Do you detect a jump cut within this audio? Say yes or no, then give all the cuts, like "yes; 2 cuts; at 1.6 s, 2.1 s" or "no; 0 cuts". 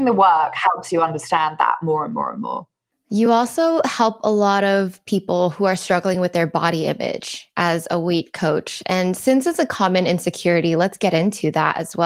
no; 0 cuts